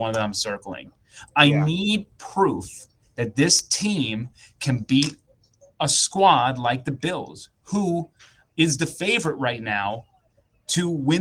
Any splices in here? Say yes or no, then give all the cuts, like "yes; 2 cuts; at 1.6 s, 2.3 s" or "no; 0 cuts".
no; 0 cuts